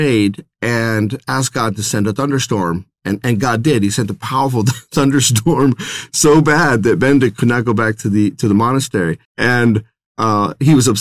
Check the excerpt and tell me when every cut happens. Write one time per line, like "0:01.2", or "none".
0:09.2